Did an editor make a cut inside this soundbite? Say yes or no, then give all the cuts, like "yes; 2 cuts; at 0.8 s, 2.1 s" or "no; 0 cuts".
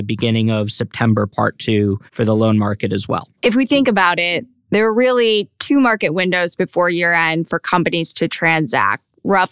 yes; 2 cuts; at 2.1 s, 3.3 s